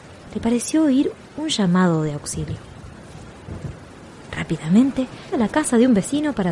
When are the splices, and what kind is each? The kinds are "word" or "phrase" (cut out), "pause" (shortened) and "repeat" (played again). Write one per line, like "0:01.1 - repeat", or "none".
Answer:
0:05.3 - phrase